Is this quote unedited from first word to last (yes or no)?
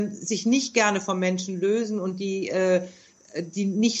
yes